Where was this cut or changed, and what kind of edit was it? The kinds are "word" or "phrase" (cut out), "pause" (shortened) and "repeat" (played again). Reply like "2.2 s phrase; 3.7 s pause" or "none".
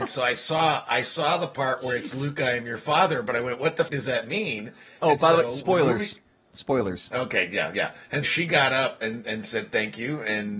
3.9 s word; 8.2 s word; 9.0 s word

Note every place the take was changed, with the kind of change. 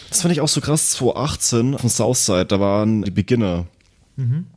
1.8 s word; 3.0 s word

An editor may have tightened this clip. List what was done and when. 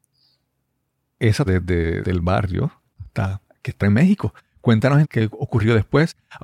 1.5 s word; 2.0 s word; 3.8 s word; 5.0 s word

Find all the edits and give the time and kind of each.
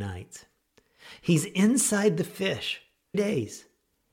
3.1 s phrase

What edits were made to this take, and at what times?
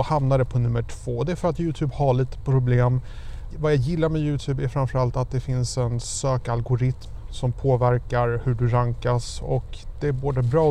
3.5 s word

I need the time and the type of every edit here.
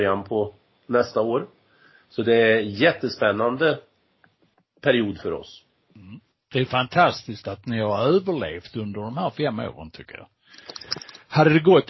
none

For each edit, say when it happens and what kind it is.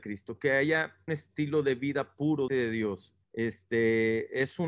1.1 s word; 2.5 s word; 3.2 s pause

